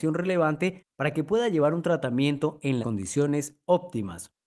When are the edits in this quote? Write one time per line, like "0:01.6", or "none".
0:02.8